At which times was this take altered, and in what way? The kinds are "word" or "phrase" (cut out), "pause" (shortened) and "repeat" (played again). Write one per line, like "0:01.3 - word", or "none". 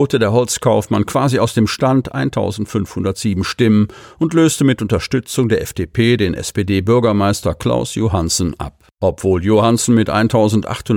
0:08.9 - pause